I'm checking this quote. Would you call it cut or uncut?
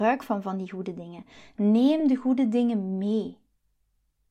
uncut